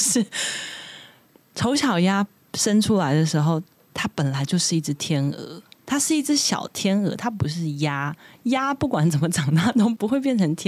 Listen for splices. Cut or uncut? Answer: uncut